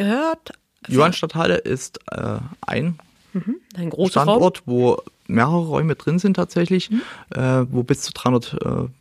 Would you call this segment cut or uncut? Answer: uncut